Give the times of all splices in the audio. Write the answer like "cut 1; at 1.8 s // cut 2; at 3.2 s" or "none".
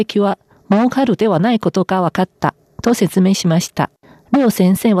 none